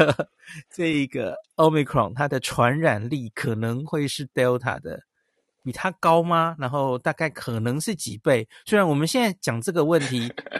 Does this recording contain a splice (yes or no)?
no